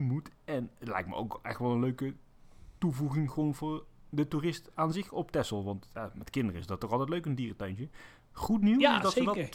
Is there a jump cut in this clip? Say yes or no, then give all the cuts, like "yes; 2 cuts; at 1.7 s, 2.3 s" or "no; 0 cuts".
no; 0 cuts